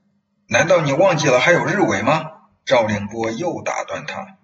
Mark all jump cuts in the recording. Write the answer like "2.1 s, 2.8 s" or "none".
none